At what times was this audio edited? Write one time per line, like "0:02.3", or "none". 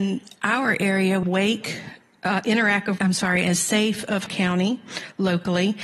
0:01.2
0:03.0
0:04.3